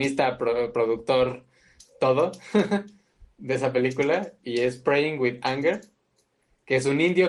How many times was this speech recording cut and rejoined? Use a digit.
0